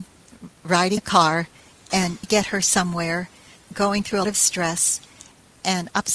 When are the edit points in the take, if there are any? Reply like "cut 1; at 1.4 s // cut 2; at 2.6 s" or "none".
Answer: cut 1; at 1.0 s // cut 2; at 2.2 s // cut 3; at 3.6 s // cut 4; at 4.2 s